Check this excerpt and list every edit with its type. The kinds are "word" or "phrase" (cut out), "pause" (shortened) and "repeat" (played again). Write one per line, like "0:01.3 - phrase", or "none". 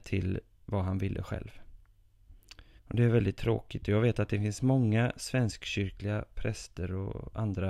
0:02.8 - pause